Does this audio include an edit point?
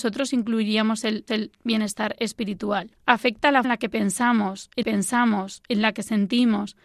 yes; 4 cuts; at 1.3 s, 3.0 s, 3.6 s, 4.8 s

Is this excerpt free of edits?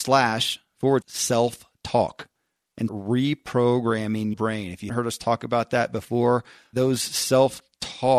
no; 5 cuts; at 1.0 s, 2.9 s, 4.3 s, 4.9 s, 6.7 s

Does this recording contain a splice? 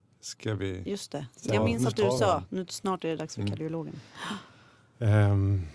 no; 0 cuts

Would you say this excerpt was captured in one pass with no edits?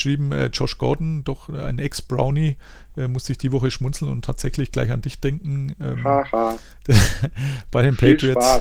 yes; 0 cuts

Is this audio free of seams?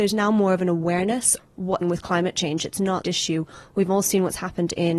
no; 3 cuts; at 1.4 s, 1.8 s, 3.0 s

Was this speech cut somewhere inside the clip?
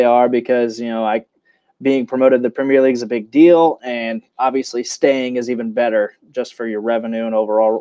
no; 0 cuts

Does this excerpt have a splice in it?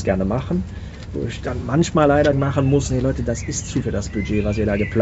yes; 2 cuts; at 2.3 s, 3.8 s

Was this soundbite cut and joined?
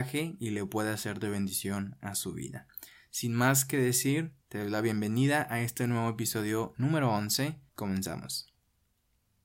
yes; 2 cuts; at 4.4 s, 7.7 s

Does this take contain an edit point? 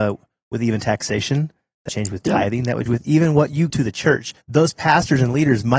yes; 4 cuts; at 1.9 s, 2.9 s, 3.7 s, 4.4 s

